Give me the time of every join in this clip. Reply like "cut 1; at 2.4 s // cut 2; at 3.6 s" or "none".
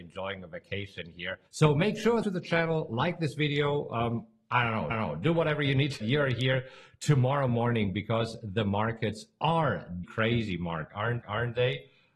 cut 1; at 1.5 s // cut 2; at 2.2 s // cut 3; at 4.9 s // cut 4; at 6.0 s // cut 5; at 10.0 s // cut 6; at 11.2 s